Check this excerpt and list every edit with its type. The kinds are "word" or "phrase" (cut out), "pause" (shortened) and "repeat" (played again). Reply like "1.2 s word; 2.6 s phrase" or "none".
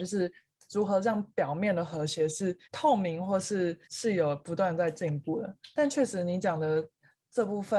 2.6 s pause; 3.8 s pause